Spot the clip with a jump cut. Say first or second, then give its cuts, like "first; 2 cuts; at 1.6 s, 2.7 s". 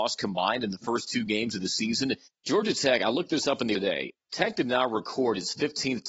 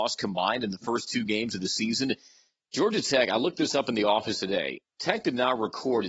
first; 2 cuts; at 2.2 s, 3.7 s